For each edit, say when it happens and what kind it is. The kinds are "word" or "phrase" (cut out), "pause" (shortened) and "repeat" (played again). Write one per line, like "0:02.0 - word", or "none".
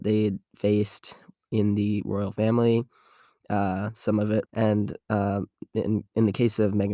0:04.5 - phrase